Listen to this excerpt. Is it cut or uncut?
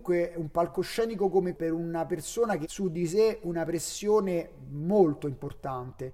cut